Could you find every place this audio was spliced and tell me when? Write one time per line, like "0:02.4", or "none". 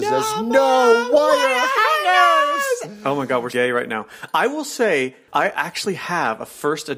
0:03.5